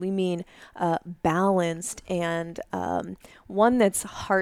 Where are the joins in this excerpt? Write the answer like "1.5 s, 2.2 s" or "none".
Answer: none